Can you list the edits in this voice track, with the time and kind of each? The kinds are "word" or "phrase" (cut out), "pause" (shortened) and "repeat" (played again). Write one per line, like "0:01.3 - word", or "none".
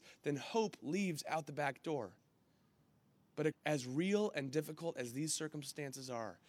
0:03.5 - phrase